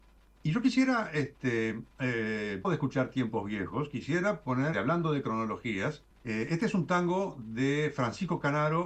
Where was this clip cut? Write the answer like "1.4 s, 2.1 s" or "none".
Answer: 2.6 s, 4.7 s, 6.1 s